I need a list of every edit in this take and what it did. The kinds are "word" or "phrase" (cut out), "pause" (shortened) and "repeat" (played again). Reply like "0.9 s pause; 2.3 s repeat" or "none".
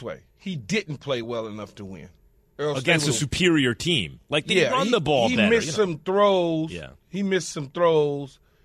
none